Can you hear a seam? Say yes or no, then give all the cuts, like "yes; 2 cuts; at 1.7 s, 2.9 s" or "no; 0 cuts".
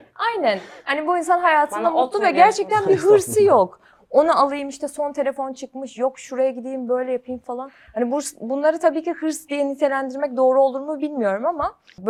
no; 0 cuts